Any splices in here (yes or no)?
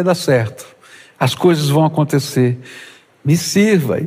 no